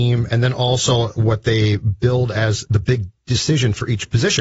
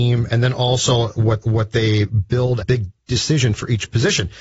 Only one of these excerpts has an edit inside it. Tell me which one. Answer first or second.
second